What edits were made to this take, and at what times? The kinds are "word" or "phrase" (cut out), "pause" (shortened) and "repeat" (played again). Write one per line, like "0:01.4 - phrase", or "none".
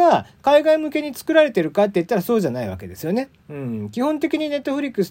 0:03.4 - pause